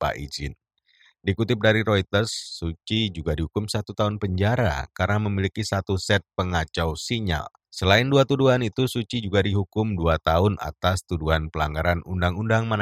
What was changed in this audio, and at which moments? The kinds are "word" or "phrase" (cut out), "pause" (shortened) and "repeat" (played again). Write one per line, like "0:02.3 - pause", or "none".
0:07.6 - pause

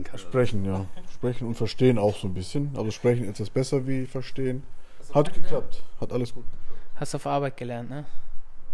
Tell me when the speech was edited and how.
0:05.3 - word

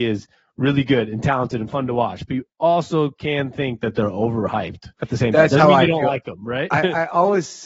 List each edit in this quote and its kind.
0:04.9 - pause

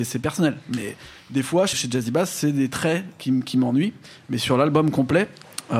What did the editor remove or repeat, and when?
0:01.7 - phrase

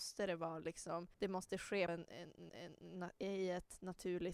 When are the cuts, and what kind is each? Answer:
0:01.1 - pause
0:01.9 - word
0:02.5 - repeat

